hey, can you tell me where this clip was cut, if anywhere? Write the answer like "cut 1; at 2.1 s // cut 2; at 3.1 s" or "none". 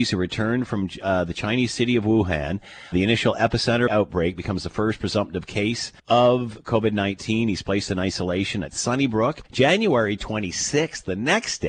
cut 1; at 2.9 s // cut 2; at 3.9 s // cut 3; at 6.0 s // cut 4; at 9.5 s